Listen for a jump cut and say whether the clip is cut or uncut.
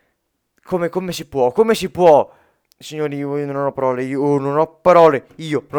cut